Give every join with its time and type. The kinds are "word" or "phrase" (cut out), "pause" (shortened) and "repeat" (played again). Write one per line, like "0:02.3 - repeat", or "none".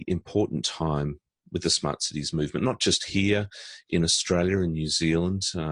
none

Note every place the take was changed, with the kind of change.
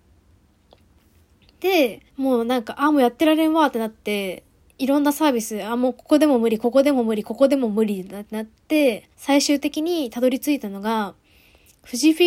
0:02.1 - pause
0:04.6 - pause
0:09.1 - pause

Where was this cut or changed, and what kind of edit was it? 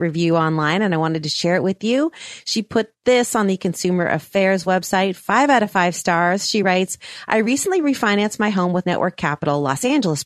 none

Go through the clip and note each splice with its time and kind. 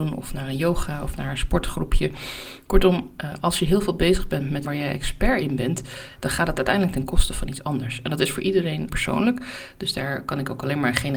0:04.6 - phrase
0:08.9 - phrase

